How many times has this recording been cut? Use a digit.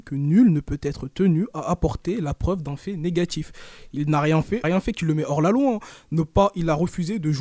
1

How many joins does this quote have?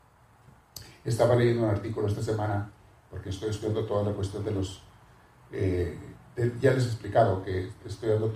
0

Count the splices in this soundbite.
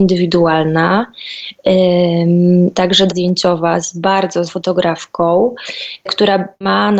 3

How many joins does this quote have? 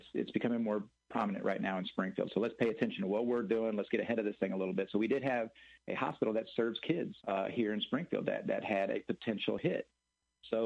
1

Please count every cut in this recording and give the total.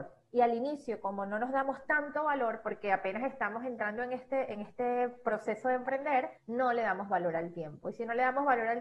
1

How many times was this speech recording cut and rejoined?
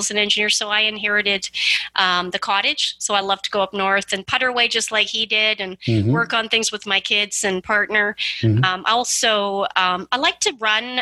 0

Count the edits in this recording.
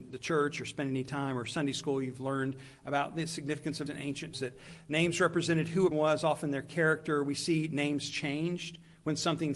3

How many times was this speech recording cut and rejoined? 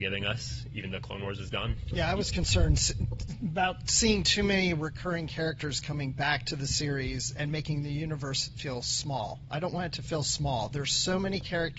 0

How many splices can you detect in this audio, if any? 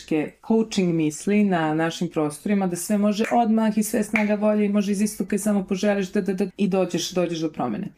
2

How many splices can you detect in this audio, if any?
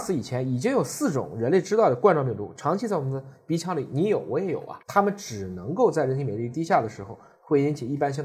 1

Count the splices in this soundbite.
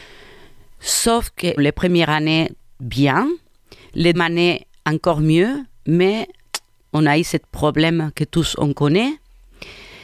2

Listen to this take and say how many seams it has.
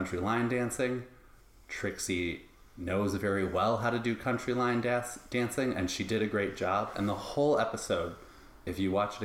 0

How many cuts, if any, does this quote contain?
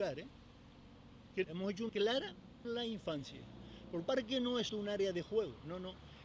5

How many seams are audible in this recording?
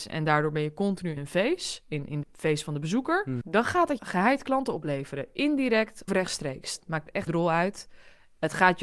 6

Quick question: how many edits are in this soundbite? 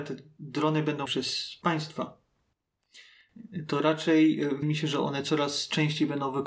2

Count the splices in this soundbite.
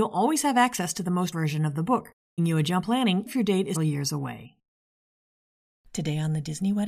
5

